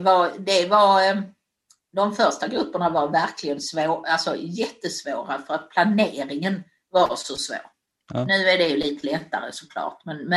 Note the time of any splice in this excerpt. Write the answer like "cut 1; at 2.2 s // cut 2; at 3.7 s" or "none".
none

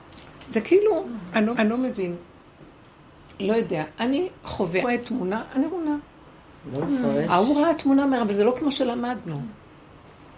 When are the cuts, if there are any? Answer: cut 1; at 1.5 s // cut 2; at 4.8 s // cut 3; at 5.7 s

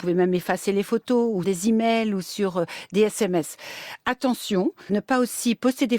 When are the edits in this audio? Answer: cut 1; at 1.4 s // cut 2; at 4.9 s

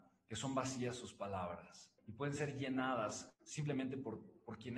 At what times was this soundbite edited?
none

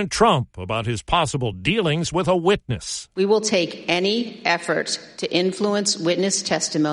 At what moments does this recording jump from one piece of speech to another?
none

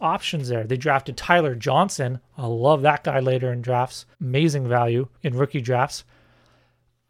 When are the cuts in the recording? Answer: cut 1; at 4.1 s // cut 2; at 5.2 s

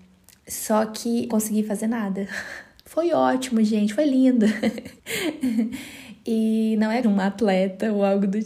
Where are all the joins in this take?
cut 1; at 1.3 s // cut 2; at 5.0 s // cut 3; at 7.0 s

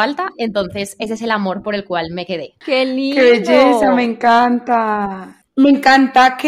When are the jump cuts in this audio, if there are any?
none

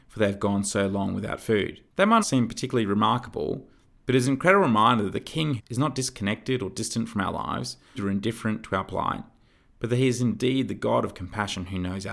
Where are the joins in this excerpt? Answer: cut 1; at 1.9 s // cut 2; at 2.2 s // cut 3; at 5.6 s // cut 4; at 7.9 s

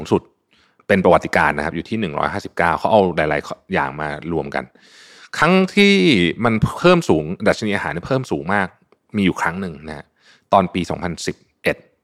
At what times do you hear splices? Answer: none

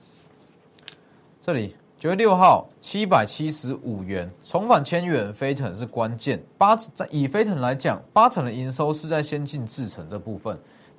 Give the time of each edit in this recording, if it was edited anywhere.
cut 1; at 2.7 s // cut 2; at 6.5 s

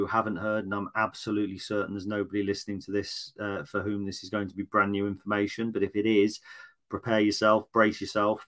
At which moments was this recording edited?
none

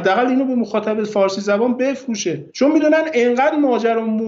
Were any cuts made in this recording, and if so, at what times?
cut 1; at 2.5 s

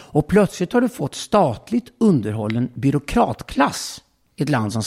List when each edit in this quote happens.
cut 1; at 1.1 s

